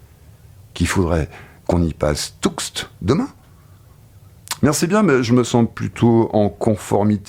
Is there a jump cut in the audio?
no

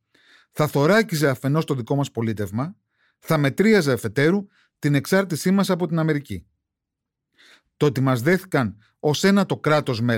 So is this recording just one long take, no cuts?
yes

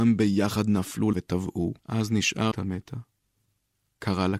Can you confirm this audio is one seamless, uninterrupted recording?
no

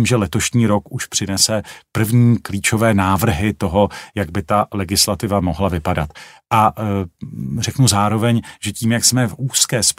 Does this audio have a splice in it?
no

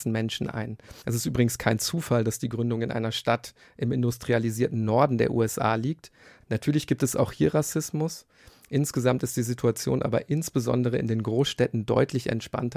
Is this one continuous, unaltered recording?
yes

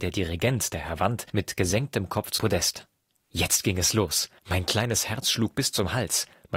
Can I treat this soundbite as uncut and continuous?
no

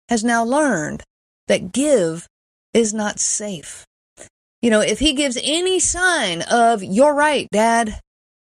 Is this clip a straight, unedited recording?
yes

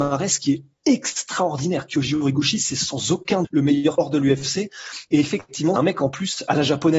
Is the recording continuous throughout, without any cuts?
no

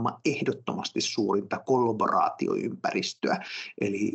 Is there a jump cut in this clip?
no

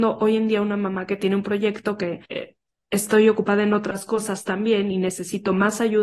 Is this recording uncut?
no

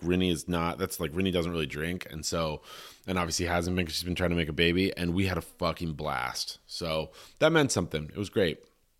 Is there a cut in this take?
no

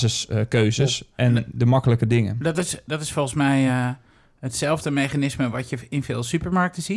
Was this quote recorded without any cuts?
yes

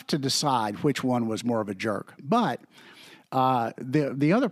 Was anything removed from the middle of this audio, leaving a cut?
no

